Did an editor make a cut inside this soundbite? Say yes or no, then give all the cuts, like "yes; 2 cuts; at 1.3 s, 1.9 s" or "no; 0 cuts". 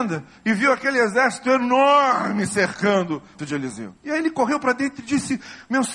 yes; 2 cuts; at 3.4 s, 4.0 s